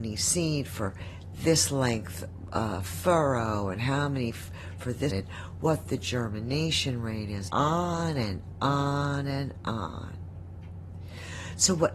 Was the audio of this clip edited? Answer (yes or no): yes